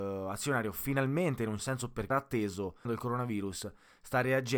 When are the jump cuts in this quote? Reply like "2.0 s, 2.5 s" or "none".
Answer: 1.6 s, 2.1 s, 2.9 s

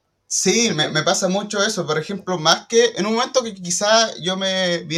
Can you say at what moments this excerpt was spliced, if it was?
none

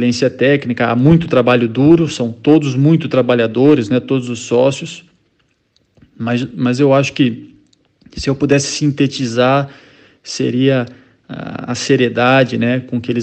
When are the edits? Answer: none

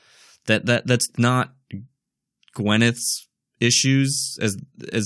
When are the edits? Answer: 1.2 s

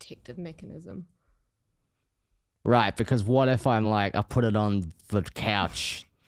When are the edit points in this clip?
none

